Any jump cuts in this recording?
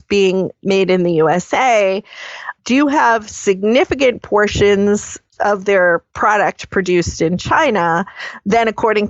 yes; 1 cut; at 6.1 s

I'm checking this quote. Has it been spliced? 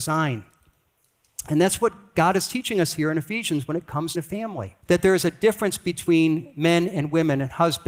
yes; 2 cuts; at 4.1 s, 4.8 s

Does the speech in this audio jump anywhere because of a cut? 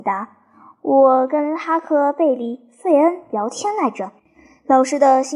yes; 1 cut; at 4.2 s

